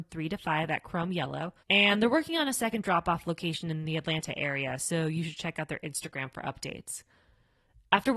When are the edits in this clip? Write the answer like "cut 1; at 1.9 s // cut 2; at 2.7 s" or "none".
cut 1; at 1.6 s